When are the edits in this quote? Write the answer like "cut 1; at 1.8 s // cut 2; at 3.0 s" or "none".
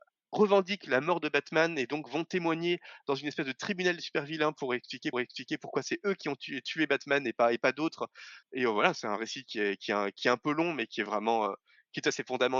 cut 1; at 5.1 s // cut 2; at 8.4 s